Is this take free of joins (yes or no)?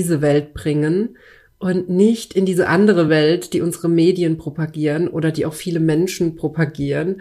yes